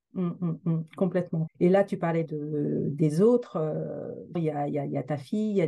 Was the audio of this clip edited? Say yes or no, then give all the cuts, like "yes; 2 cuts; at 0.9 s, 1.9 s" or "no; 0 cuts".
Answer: yes; 3 cuts; at 1.5 s, 2.2 s, 4.3 s